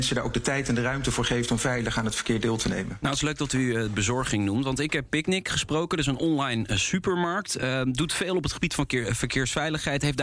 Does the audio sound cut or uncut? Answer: uncut